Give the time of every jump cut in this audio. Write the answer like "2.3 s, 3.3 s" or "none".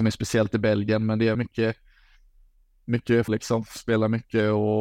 1.3 s, 3.3 s